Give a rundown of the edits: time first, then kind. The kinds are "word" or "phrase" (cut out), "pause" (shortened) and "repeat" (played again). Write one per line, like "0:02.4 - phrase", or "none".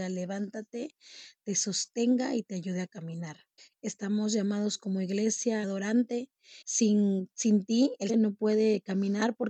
0:03.6 - pause
0:05.6 - phrase
0:06.6 - pause
0:08.1 - word